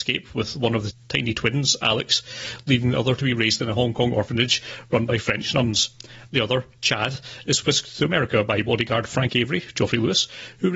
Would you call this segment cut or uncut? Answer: uncut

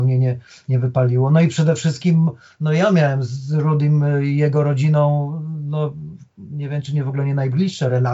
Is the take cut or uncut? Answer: uncut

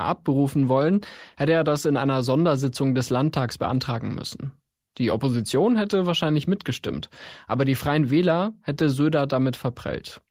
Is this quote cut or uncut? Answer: uncut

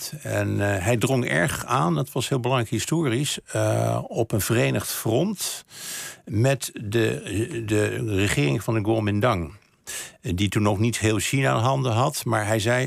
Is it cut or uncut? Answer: uncut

